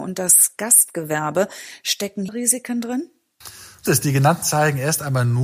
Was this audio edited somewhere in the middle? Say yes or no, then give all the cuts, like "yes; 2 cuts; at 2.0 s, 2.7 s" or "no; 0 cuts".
yes; 3 cuts; at 2.3 s, 3.9 s, 4.4 s